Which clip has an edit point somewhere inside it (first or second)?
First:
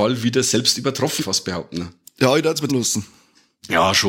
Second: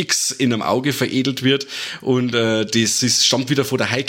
first